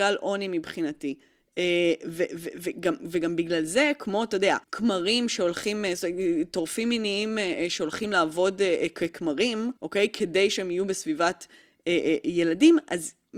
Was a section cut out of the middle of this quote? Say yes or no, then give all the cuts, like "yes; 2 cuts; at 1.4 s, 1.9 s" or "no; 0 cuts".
yes; 2 cuts; at 4.6 s, 9.8 s